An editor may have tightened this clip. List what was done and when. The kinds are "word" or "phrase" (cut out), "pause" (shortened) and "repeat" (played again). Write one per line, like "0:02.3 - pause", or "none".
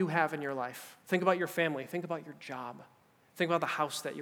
0:01.0 - pause